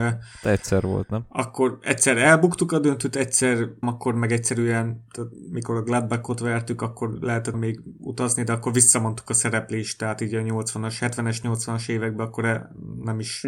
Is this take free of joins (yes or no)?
no